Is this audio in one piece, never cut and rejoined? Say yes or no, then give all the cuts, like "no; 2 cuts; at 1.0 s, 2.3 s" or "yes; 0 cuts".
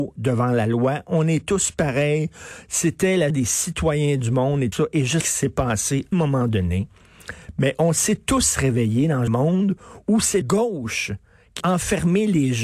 no; 7 cuts; at 3.3 s, 4.7 s, 5.2 s, 6.1 s, 9.3 s, 10.4 s, 11.6 s